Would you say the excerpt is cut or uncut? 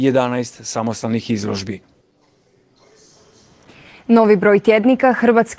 uncut